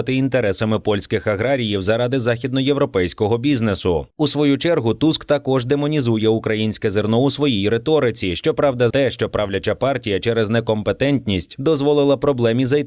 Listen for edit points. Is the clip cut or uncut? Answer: cut